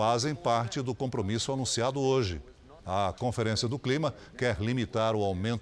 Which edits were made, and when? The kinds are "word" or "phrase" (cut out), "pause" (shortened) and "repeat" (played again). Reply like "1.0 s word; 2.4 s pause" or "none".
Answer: 2.8 s pause